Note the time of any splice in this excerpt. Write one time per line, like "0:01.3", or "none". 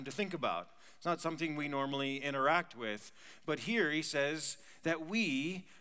none

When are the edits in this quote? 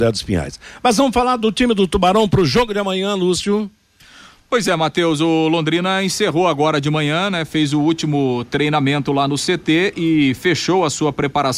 none

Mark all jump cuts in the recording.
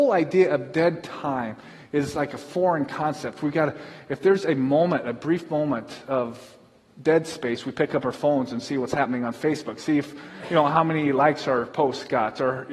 none

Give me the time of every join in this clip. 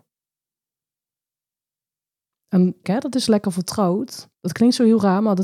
0:02.8
0:04.3

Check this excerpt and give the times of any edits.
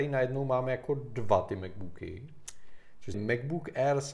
0:03.1

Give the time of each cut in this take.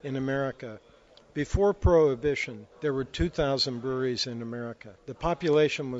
0:02.7
0:05.0

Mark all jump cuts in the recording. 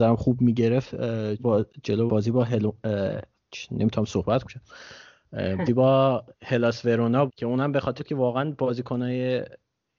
0:01.4
0:02.1
0:04.4
0:05.7
0:07.3
0:08.0

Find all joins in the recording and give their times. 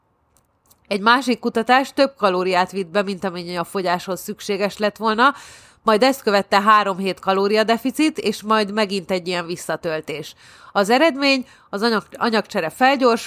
none

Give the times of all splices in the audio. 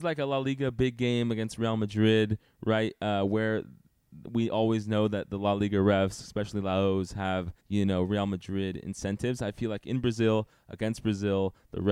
0:07.6

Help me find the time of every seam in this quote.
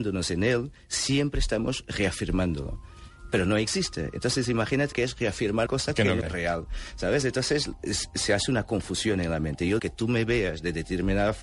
0:04.9
0:05.7
0:06.2
0:09.8

